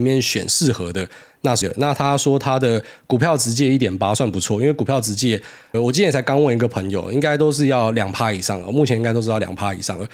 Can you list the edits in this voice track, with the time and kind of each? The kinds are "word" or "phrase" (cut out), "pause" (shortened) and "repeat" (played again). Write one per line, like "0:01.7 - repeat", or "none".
0:01.6 - word
0:05.7 - word